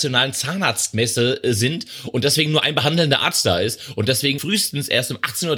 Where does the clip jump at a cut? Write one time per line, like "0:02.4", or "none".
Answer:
0:04.4